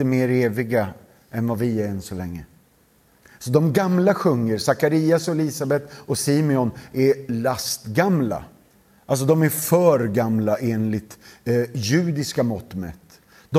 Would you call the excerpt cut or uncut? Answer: uncut